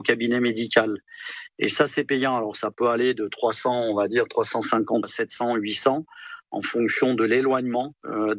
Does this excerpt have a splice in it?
yes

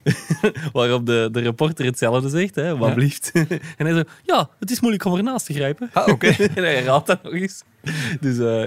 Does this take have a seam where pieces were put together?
no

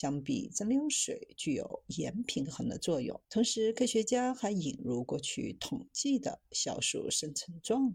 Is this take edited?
yes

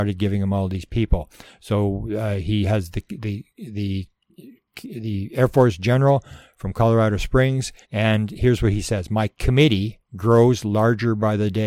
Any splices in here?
yes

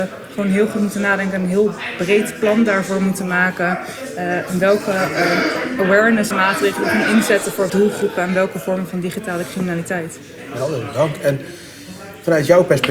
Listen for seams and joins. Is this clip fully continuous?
no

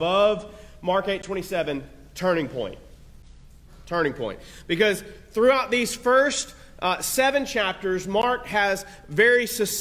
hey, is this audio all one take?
yes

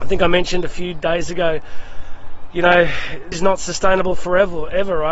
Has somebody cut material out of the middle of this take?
yes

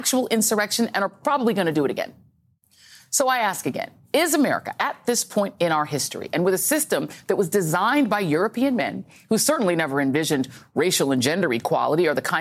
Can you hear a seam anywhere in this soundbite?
no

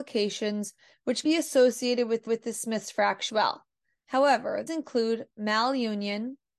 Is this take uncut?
no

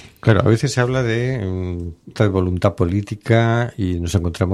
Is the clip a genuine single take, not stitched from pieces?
no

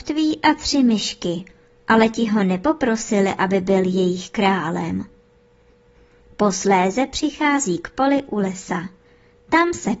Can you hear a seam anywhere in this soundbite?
no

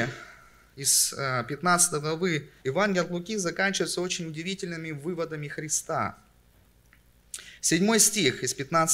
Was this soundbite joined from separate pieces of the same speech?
yes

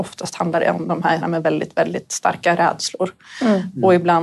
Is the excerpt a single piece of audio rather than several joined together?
no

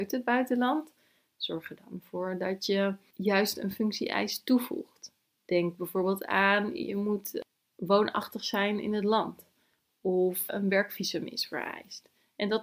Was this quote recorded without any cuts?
yes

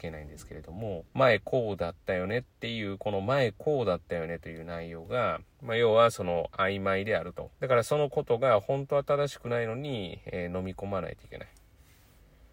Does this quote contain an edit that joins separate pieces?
yes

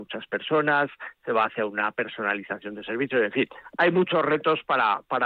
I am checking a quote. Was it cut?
no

